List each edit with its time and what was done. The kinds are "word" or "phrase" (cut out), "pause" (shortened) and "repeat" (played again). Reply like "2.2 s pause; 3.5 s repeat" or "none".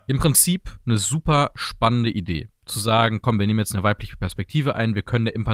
none